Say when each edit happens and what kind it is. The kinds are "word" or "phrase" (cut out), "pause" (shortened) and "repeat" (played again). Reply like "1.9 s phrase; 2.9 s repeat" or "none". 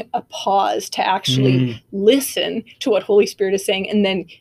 none